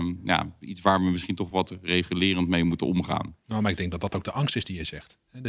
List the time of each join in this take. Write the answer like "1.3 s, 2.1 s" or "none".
none